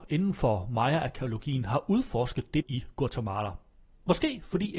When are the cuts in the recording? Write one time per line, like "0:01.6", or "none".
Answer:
0:02.6